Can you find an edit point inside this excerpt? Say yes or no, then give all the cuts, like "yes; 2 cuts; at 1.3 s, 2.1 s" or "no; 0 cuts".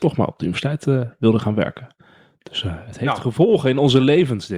no; 0 cuts